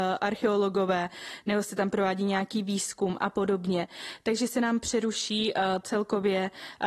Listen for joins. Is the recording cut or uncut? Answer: uncut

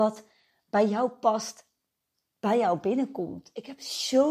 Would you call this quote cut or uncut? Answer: uncut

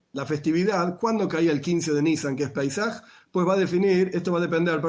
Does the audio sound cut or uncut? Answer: uncut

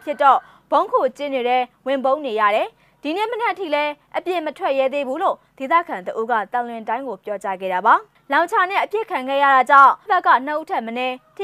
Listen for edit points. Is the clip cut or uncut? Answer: cut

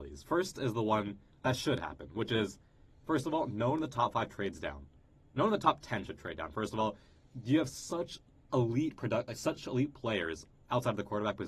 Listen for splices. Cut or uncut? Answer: uncut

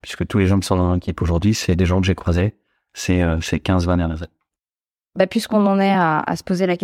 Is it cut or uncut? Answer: uncut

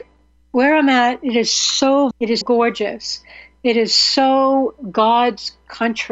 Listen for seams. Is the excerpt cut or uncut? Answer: cut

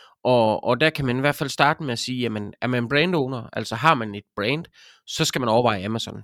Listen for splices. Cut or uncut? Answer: uncut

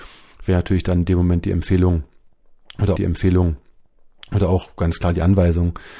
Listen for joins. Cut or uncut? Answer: cut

